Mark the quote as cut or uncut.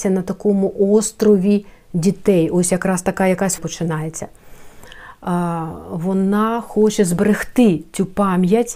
cut